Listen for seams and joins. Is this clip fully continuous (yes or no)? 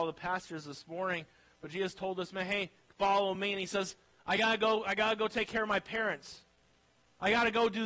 yes